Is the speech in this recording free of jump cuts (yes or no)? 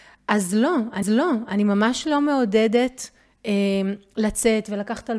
no